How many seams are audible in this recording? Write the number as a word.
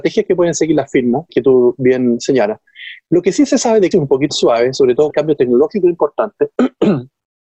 four